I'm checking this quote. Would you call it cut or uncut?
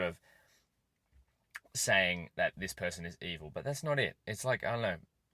uncut